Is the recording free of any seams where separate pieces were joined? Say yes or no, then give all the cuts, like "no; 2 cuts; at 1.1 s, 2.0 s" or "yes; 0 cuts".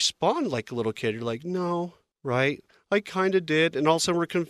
no; 1 cut; at 2.1 s